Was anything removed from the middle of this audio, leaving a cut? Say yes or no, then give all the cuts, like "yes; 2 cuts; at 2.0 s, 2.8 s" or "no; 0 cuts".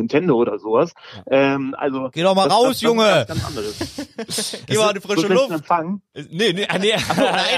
no; 0 cuts